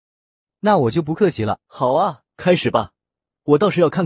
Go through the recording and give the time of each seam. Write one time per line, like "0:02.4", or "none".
0:01.6
0:02.3